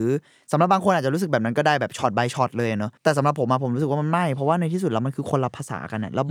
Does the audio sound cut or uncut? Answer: cut